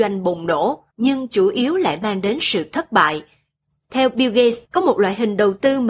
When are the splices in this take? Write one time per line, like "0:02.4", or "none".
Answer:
0:00.9
0:04.6

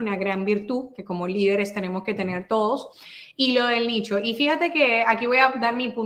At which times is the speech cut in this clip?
none

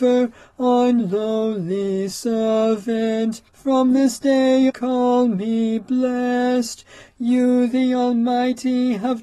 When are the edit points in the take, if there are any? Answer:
0:01.0
0:03.5
0:04.7

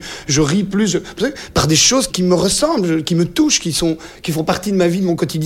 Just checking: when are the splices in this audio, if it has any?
0:02.1

